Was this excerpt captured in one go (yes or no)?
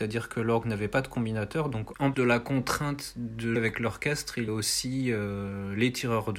no